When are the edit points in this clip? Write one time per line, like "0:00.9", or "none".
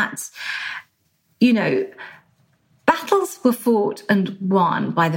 none